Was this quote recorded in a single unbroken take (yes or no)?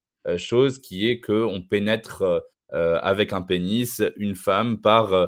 yes